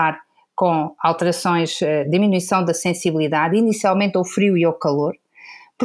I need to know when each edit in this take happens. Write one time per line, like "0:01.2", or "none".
none

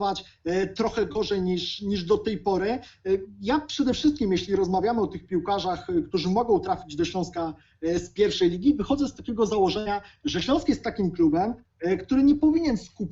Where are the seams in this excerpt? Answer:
none

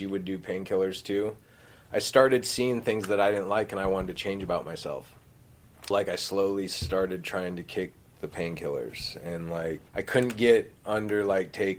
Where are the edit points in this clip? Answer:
0:05.9
0:09.9

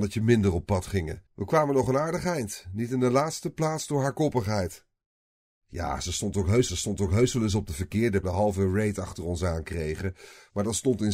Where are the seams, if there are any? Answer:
0:01.3
0:06.7
0:08.2

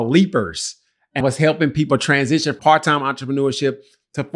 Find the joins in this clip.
0:01.2
0:02.6

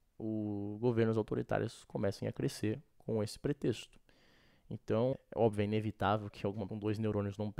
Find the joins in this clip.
0:05.1
0:06.7

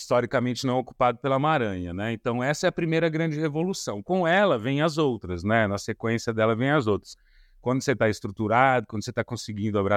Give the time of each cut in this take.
none

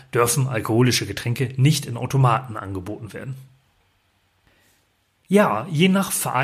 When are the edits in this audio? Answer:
none

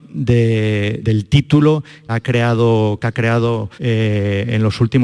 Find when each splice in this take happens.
0:01.0
0:02.1
0:03.0
0:03.7

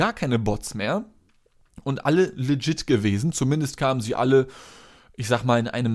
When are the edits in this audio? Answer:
none

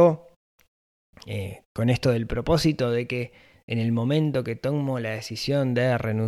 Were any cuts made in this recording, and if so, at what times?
none

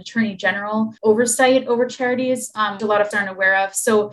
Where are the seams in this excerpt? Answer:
0:01.0
0:02.8
0:03.1

